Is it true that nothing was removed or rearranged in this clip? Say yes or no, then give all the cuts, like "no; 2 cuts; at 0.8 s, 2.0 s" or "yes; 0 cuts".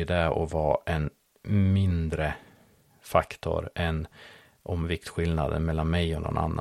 yes; 0 cuts